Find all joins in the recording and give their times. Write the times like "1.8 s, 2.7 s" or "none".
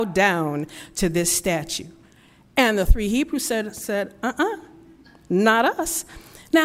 none